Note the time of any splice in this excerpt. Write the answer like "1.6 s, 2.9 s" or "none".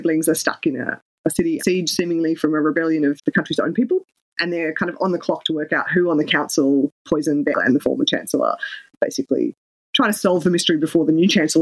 1.6 s, 3.2 s, 7.5 s